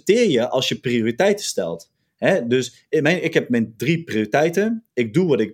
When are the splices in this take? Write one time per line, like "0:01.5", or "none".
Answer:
none

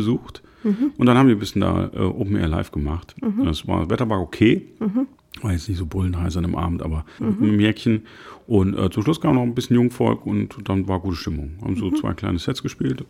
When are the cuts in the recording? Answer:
0:05.2
0:07.2

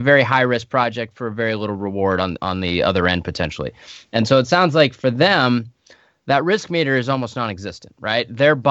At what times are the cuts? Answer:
none

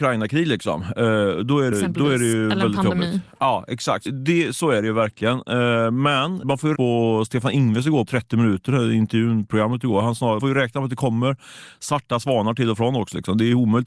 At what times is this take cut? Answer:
0:01.7
0:04.1
0:06.4
0:06.7
0:08.1
0:10.4

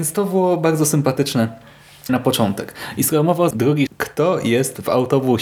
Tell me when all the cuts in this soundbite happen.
0:02.1
0:03.5
0:03.9

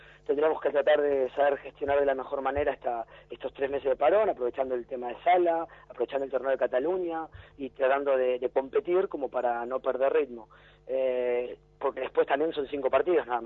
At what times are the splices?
none

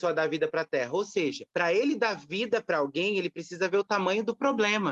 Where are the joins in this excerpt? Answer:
0:01.5

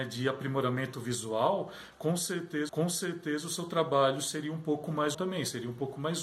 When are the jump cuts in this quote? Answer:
0:02.7
0:05.1

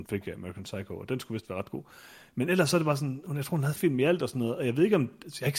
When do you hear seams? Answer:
0:03.7

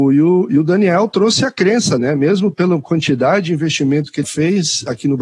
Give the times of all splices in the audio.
0:02.0
0:04.2

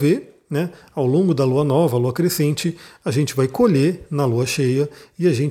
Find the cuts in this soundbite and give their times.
none

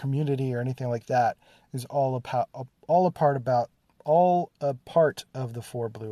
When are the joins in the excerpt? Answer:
0:02.8

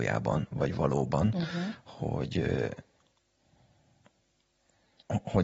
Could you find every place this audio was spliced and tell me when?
none

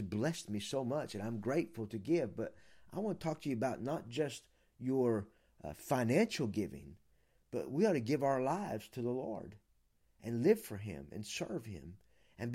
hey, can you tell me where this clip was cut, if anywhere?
none

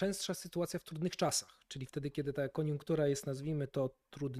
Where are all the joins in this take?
none

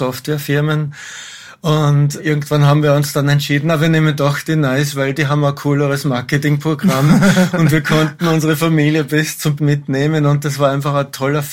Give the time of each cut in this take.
0:02.2
0:09.6

